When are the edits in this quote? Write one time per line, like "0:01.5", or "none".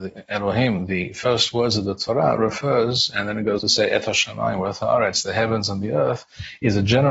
0:03.6